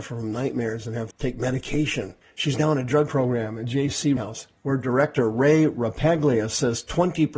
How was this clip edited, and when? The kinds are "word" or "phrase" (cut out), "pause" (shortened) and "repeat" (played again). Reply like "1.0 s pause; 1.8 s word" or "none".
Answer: 1.1 s word; 2.2 s pause; 3.1 s word; 4.2 s word; 4.6 s pause